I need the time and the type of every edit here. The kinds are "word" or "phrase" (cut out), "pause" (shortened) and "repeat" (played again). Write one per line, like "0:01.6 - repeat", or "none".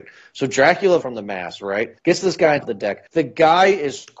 0:01.0 - phrase
0:02.0 - pause
0:02.6 - word
0:03.1 - pause